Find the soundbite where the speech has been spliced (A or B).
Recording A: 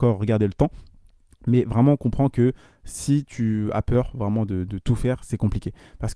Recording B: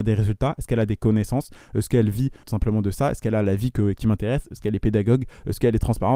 B